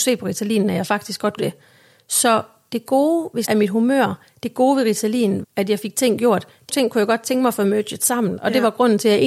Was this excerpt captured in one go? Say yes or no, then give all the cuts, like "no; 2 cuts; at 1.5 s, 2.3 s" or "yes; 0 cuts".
no; 4 cuts; at 1.4 s, 3.5 s, 5.4 s, 6.7 s